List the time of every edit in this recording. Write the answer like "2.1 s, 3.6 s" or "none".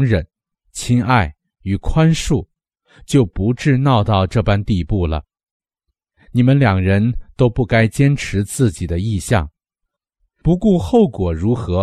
none